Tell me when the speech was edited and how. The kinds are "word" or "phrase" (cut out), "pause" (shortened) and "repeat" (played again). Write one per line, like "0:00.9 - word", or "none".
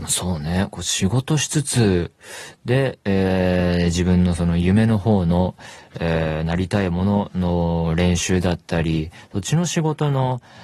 none